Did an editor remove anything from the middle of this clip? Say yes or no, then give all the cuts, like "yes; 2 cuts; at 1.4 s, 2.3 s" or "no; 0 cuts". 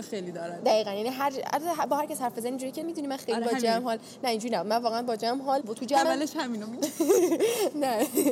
yes; 3 cuts; at 2.8 s, 5.6 s, 6.0 s